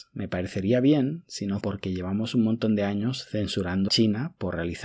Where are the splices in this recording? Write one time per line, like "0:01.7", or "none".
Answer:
0:01.6
0:03.9